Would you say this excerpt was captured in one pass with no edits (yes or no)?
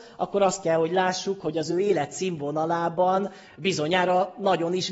yes